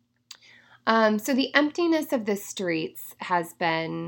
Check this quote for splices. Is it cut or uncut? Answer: uncut